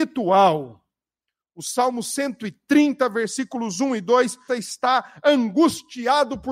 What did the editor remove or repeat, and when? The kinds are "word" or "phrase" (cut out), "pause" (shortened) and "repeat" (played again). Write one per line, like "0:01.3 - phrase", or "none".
0:04.5 - phrase